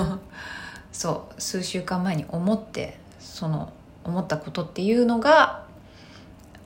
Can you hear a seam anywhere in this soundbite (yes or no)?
no